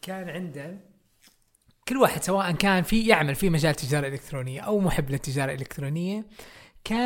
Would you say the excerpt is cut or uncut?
uncut